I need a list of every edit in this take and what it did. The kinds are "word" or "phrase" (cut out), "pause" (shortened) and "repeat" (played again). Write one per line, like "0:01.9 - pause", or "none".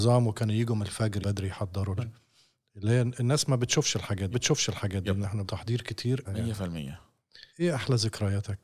0:01.2 - word
0:02.0 - word
0:04.3 - repeat
0:05.4 - word
0:06.2 - phrase
0:07.5 - pause